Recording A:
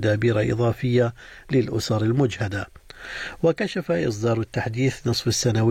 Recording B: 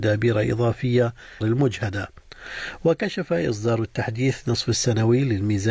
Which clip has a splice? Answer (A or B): B